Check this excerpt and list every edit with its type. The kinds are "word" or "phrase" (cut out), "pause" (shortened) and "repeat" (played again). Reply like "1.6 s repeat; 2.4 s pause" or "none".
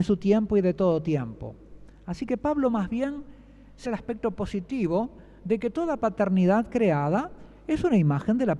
3.9 s word

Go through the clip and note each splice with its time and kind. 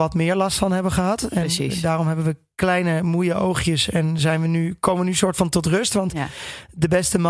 none

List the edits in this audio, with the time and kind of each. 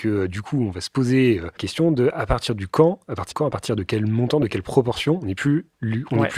1.6 s word; 3.3 s word

